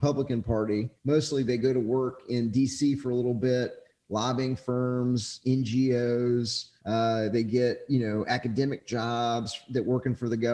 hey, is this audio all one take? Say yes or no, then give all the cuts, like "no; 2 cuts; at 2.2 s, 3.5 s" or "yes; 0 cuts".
no; 2 cuts; at 1.0 s, 6.8 s